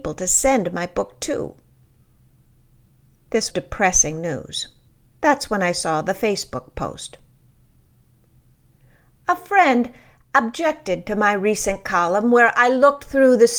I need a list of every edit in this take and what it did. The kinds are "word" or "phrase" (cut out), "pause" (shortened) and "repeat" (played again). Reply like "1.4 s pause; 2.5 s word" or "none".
3.5 s word; 4.9 s pause